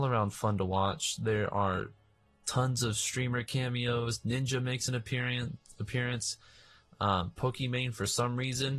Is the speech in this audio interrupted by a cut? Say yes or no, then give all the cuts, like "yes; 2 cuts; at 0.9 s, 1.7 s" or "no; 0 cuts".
no; 0 cuts